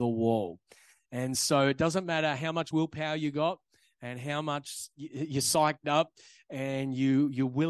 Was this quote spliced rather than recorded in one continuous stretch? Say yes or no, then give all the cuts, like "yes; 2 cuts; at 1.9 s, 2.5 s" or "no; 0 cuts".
no; 0 cuts